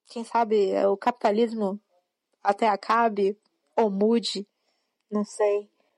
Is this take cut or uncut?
uncut